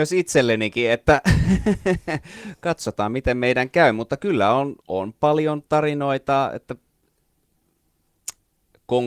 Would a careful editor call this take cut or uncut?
cut